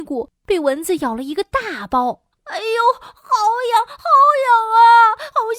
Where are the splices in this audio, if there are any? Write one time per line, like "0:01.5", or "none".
0:02.3